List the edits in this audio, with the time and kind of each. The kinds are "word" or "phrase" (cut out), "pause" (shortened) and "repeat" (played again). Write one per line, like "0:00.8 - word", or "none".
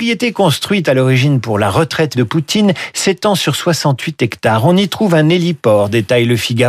0:02.1 - word